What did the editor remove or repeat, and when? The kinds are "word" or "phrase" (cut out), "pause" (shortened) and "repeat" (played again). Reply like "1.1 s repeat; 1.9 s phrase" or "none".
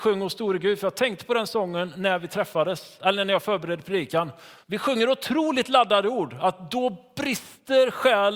4.6 s pause